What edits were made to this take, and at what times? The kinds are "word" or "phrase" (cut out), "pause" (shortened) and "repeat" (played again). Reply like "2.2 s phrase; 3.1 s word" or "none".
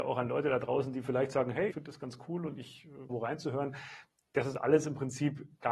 1.7 s word; 3.1 s phrase